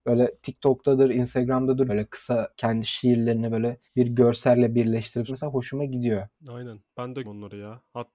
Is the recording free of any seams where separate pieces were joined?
no; 6 cuts; at 1.9 s, 2.5 s, 3.8 s, 5.3 s, 6.4 s, 7.2 s

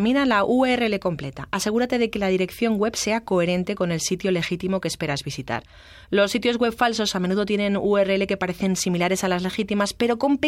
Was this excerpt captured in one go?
yes; 0 cuts

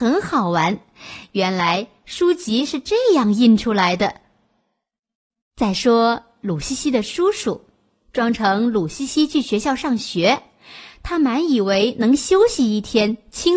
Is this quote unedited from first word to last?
yes; 0 cuts

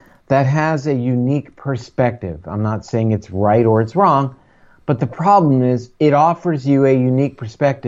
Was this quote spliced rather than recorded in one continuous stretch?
no; 0 cuts

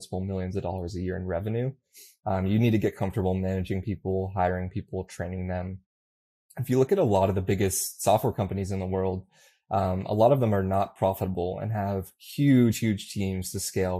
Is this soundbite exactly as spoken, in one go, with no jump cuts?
yes; 0 cuts

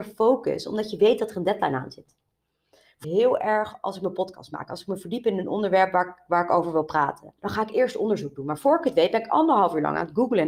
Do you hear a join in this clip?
yes; 2 cuts; at 3.0 s, 7.4 s

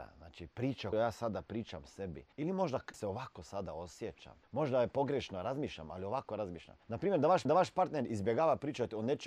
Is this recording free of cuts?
no; 6 cuts; at 0.9 s, 2.3 s, 2.9 s, 4.4 s, 6.8 s, 7.5 s

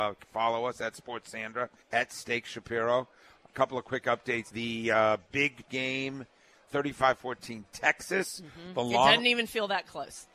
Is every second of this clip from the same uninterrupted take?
no; 5 cuts; at 1.8 s, 3.4 s, 4.5 s, 5.7 s, 6.7 s

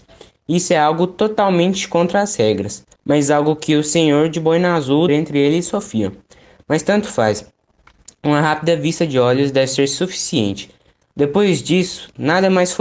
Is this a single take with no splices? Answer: no; 2 cuts; at 2.9 s, 5.1 s

